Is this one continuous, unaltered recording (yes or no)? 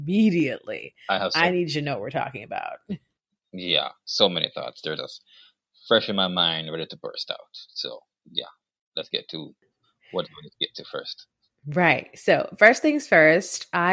yes